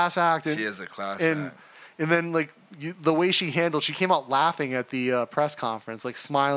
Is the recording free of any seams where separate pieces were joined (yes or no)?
yes